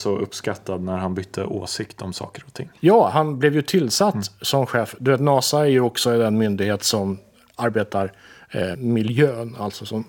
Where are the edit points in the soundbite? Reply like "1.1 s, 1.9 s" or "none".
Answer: 8.7 s